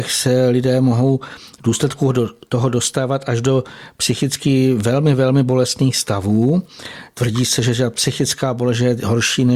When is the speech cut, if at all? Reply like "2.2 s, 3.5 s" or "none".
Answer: none